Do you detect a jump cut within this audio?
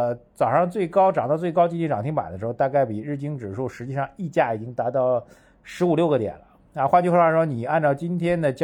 no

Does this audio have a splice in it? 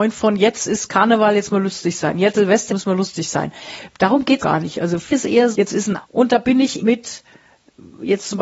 yes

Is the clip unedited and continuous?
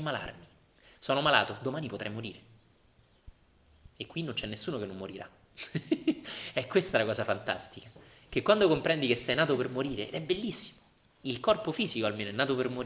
yes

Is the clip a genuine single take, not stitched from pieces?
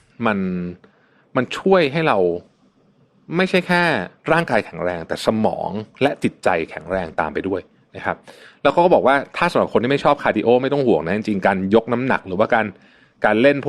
yes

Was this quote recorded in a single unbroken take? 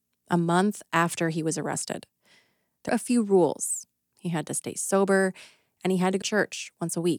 no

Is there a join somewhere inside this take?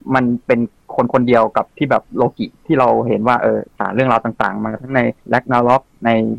yes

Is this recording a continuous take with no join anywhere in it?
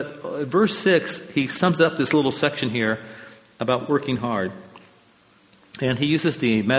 yes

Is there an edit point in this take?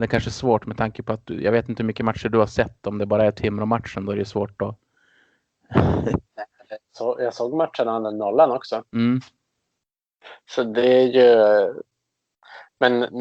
yes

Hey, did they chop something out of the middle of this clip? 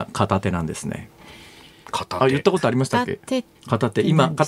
yes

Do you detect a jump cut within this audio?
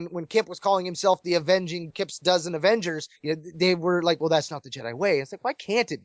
yes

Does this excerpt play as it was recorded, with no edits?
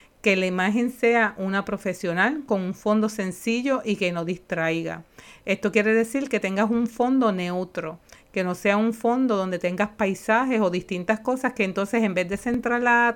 yes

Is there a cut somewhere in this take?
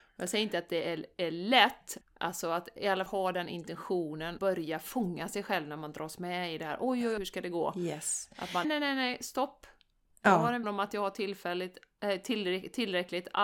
yes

